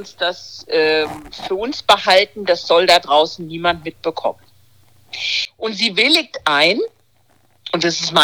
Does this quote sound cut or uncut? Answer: uncut